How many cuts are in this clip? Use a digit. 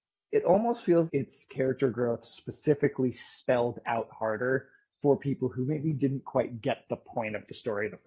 1